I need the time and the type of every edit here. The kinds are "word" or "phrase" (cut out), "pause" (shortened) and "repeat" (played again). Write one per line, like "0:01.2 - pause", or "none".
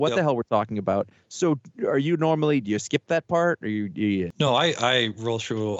none